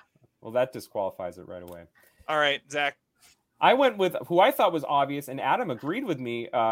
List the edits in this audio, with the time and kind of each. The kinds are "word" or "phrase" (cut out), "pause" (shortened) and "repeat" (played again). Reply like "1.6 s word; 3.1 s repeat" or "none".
none